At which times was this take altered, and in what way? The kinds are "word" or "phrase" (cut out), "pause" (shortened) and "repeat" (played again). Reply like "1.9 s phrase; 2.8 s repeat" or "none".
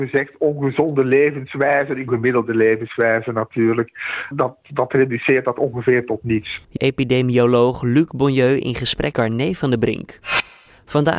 2.1 s word; 4.3 s word; 6.8 s word; 9.1 s word